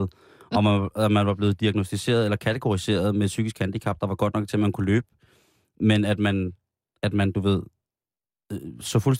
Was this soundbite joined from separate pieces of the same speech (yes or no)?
no